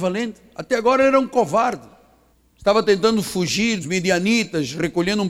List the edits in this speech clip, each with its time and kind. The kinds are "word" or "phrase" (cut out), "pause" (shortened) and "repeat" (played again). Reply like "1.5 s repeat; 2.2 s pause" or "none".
2.3 s pause; 3.8 s word